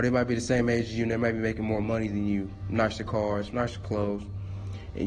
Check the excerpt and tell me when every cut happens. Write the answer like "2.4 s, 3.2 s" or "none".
none